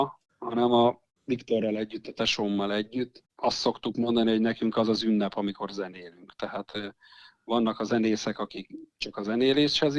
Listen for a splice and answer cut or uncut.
uncut